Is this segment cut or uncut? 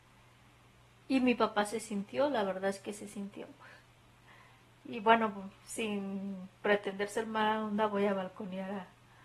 uncut